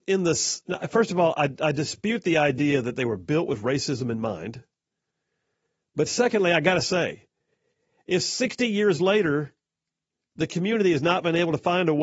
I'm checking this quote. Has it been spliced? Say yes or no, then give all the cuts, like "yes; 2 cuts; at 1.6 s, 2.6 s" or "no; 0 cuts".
no; 0 cuts